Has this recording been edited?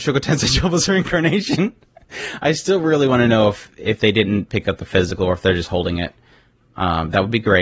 no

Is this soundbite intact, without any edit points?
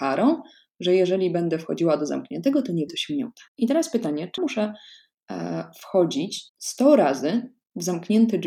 no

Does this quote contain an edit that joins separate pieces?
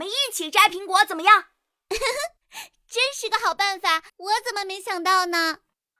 yes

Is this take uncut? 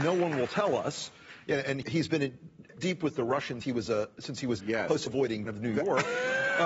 no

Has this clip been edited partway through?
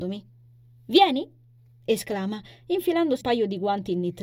yes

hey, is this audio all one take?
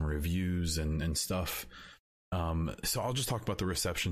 no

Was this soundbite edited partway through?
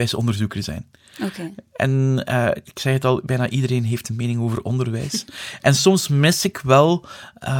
no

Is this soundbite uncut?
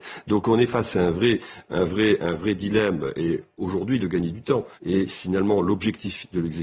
no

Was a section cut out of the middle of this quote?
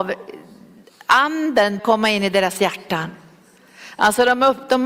yes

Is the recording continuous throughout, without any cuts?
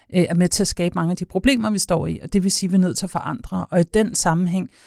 yes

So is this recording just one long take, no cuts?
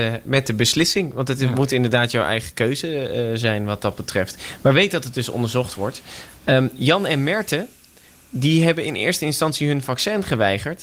yes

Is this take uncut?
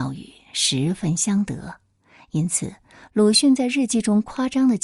yes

